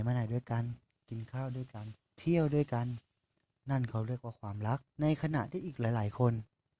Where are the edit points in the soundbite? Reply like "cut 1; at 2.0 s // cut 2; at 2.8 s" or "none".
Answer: cut 1; at 2.0 s // cut 2; at 4.9 s